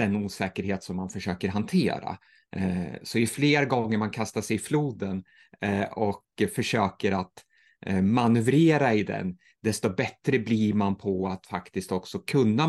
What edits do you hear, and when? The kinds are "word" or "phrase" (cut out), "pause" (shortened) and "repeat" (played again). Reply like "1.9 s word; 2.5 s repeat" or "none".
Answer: none

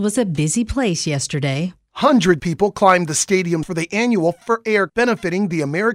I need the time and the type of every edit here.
2.4 s word; 3.6 s word; 4.4 s word; 4.9 s word

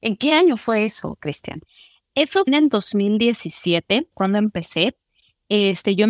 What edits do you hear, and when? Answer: 2.5 s word; 4.1 s phrase

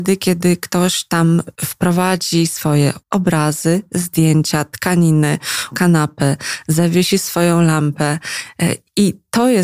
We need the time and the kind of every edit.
1.6 s pause; 3.0 s pause; 5.7 s word

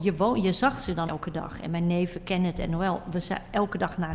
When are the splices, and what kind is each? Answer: 1.1 s word

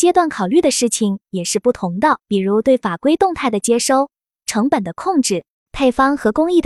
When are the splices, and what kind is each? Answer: 2.2 s pause

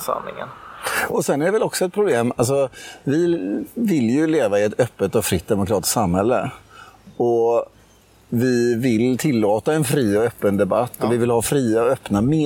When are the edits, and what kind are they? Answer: none

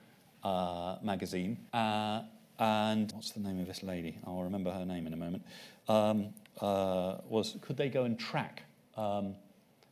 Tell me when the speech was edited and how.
1.7 s pause; 3.1 s phrase; 6.5 s phrase

